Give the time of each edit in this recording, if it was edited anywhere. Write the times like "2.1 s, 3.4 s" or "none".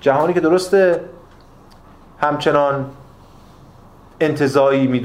none